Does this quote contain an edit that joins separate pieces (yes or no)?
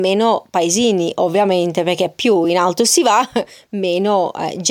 no